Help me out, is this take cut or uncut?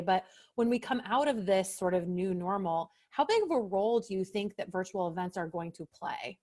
uncut